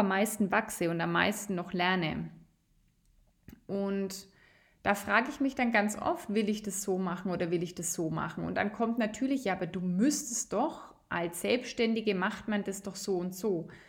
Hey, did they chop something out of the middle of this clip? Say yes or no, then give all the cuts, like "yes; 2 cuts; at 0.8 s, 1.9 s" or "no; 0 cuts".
no; 0 cuts